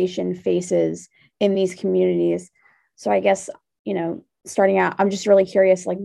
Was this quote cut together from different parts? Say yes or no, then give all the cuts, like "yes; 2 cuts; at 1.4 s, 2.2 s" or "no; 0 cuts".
no; 0 cuts